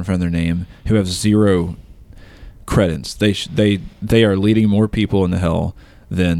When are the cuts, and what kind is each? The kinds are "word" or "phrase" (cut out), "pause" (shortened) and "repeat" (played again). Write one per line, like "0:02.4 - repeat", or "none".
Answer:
0:03.9 - pause